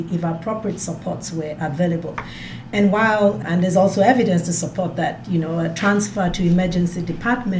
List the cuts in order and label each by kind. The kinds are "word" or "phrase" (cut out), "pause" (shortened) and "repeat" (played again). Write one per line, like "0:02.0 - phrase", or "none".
0:03.4 - word

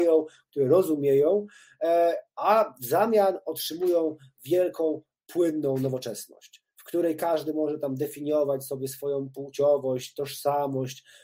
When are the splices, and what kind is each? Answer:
none

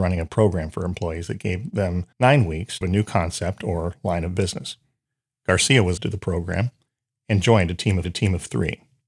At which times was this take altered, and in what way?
0:02.1 - pause
0:02.8 - word
0:06.0 - word
0:08.0 - repeat

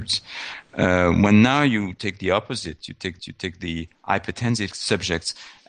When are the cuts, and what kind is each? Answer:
0:03.2 - repeat
0:04.7 - word

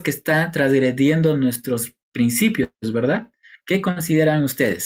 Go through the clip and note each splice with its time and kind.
none

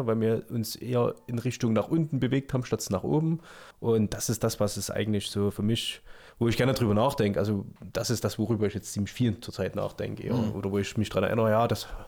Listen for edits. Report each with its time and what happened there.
0:03.7 - pause
0:07.8 - pause

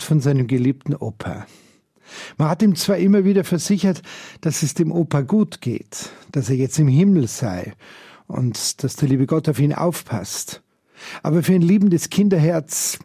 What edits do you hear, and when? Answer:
none

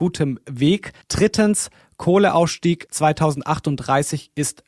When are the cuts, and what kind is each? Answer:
0:01.0 - pause

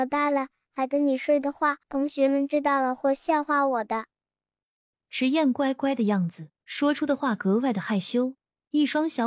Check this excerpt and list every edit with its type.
0:01.8 - pause
0:06.6 - pause

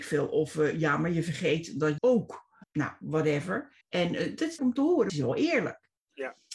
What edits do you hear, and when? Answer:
0:02.0 - word
0:02.6 - word
0:03.8 - pause
0:04.6 - phrase
0:05.1 - phrase

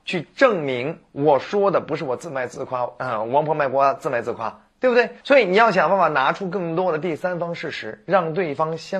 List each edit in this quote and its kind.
0:05.2 - pause

